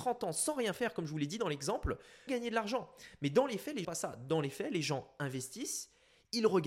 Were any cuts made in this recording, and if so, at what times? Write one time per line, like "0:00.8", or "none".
0:02.3
0:03.8